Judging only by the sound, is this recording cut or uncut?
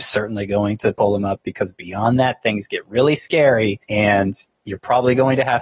cut